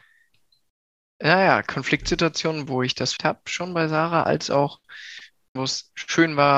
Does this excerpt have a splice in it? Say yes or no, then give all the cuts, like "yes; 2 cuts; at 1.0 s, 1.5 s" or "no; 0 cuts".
yes; 4 cuts; at 2.7 s, 3.2 s, 4.3 s, 5.6 s